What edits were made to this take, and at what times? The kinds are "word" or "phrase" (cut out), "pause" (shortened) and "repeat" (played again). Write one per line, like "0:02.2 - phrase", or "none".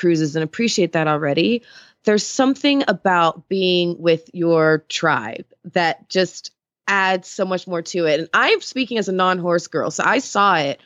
none